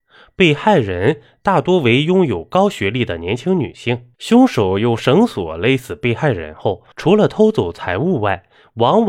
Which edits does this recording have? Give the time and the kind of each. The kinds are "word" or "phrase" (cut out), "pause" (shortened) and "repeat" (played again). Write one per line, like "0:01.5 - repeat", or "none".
0:04.1 - pause
0:06.9 - pause